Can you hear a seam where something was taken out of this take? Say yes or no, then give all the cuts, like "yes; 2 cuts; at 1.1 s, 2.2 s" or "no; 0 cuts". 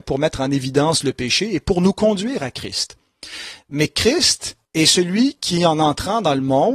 yes; 1 cut; at 4.6 s